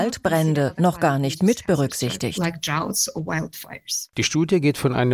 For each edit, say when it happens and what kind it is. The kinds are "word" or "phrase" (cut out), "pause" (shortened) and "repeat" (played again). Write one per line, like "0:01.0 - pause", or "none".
none